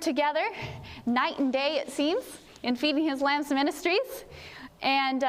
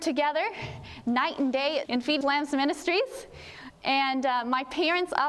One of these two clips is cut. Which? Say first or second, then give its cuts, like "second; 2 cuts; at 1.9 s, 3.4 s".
second; 2 cuts; at 1.9 s, 2.2 s